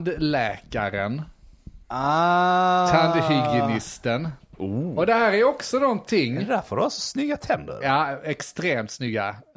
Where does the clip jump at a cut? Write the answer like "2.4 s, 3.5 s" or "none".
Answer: 1.8 s